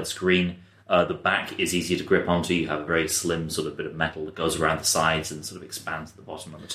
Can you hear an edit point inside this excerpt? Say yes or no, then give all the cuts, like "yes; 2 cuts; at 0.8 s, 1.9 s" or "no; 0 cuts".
yes; 1 cut; at 2.9 s